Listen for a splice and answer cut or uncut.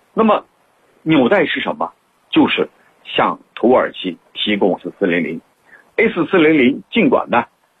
cut